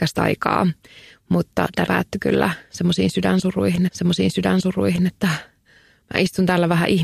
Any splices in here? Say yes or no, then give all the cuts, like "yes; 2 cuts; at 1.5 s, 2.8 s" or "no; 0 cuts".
yes; 2 cuts; at 1.9 s, 3.9 s